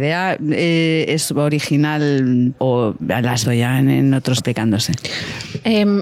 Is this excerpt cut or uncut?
cut